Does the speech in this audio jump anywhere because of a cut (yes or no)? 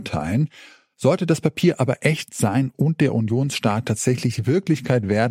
no